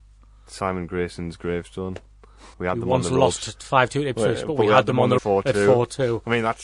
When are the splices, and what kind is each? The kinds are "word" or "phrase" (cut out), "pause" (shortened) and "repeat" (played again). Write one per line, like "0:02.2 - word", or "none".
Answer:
0:02.5 - pause
0:05.2 - word